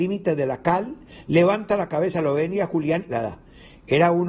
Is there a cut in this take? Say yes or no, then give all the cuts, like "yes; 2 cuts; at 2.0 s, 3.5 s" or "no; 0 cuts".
yes; 1 cut; at 3.1 s